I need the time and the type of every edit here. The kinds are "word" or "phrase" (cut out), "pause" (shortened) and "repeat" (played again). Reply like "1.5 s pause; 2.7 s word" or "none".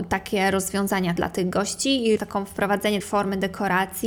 1.2 s word; 2.2 s word; 3.0 s word

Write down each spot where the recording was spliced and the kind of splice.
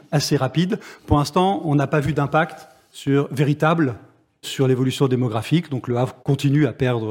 4.4 s word; 6.2 s pause

